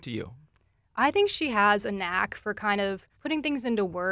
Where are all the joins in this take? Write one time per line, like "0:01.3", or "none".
0:03.1